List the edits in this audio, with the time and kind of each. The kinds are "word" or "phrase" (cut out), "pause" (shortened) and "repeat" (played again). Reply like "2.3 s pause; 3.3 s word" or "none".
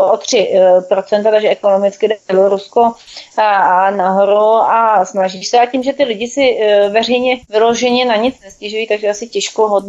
7.4 s pause